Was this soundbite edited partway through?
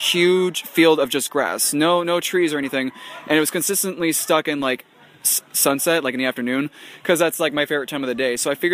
no; 0 cuts

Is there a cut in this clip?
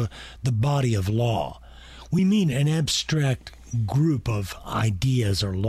no; 0 cuts

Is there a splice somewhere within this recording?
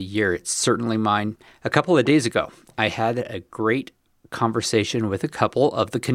yes; 1 cut; at 1.5 s

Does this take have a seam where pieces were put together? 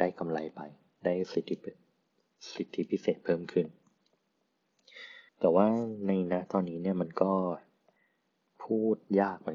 yes; 1 cut; at 5.3 s

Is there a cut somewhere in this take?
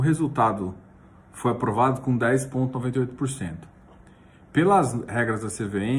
no; 0 cuts

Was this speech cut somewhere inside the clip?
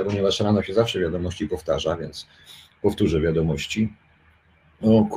no; 0 cuts

